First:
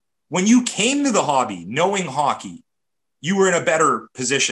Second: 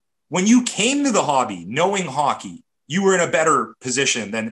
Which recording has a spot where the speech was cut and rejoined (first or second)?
second